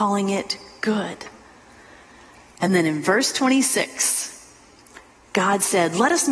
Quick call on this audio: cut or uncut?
uncut